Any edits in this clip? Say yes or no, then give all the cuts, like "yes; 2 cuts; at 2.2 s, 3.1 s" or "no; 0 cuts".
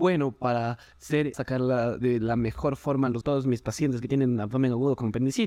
yes; 2 cuts; at 1.3 s, 3.2 s